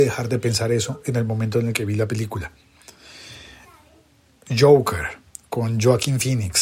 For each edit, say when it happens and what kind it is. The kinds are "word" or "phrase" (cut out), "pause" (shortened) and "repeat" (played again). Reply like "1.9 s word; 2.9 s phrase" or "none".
5.3 s pause